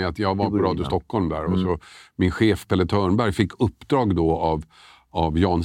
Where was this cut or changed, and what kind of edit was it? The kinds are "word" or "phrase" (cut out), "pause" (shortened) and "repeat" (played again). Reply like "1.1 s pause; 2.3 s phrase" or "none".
none